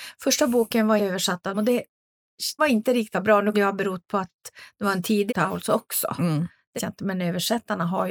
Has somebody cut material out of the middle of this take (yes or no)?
yes